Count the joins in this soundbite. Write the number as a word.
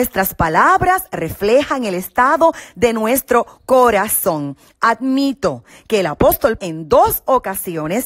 one